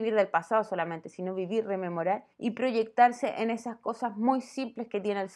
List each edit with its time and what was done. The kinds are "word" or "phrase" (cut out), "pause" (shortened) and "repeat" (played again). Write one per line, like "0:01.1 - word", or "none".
0:02.3 - pause